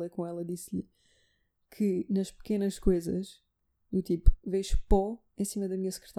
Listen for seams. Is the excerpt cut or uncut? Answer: uncut